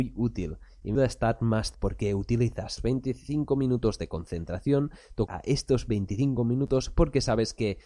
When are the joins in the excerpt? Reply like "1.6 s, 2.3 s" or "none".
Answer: 1.0 s, 1.7 s, 2.8 s, 5.3 s